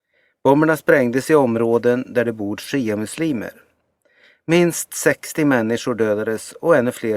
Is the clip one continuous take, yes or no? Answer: yes